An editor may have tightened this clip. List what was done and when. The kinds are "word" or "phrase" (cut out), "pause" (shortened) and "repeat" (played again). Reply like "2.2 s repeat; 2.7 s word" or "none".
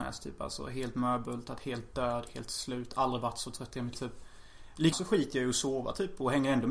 3.9 s word; 4.9 s word